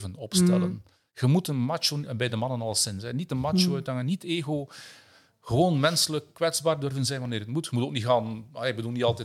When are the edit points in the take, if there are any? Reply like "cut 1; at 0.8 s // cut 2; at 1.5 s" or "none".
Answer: none